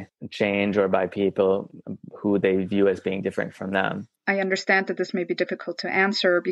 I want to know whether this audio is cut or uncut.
cut